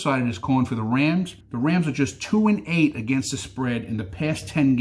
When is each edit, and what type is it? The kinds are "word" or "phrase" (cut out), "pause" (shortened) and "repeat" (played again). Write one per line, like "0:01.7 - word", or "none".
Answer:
0:01.4 - pause